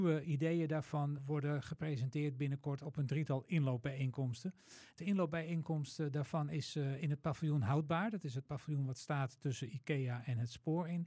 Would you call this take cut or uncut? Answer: cut